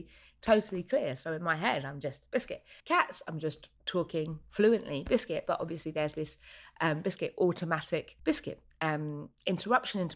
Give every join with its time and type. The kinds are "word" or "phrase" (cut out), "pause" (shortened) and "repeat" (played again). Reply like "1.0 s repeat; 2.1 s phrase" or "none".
2.8 s pause; 3.7 s pause; 8.2 s pause